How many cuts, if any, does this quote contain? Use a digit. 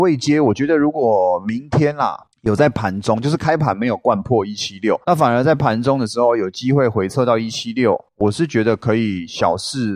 2